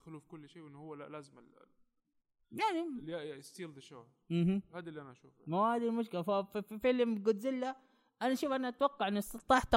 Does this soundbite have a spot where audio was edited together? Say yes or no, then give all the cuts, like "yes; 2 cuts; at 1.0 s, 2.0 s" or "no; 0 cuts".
no; 0 cuts